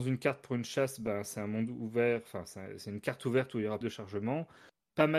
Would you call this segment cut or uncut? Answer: cut